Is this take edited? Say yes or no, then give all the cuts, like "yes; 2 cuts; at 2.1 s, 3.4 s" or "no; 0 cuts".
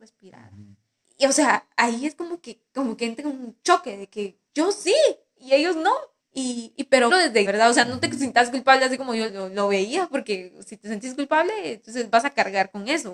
yes; 6 cuts; at 1.0 s, 4.5 s, 6.2 s, 7.1 s, 7.5 s, 9.3 s